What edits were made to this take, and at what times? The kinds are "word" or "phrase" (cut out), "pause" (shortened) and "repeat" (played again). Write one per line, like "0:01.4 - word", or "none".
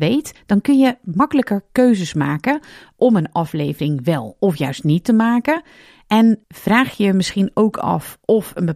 none

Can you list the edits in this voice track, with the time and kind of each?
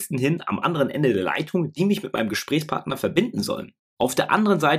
none

